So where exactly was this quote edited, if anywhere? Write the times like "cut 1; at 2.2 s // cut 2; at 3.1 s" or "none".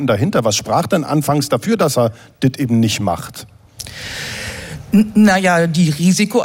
none